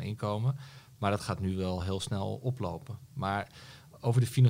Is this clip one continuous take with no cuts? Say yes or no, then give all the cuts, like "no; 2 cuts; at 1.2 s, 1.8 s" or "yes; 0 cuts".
yes; 0 cuts